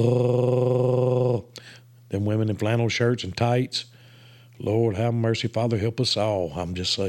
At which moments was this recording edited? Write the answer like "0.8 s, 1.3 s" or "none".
none